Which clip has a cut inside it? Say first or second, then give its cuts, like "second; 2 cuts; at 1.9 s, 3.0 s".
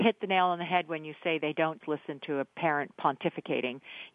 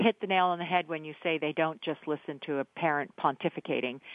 first; 1 cut; at 1.8 s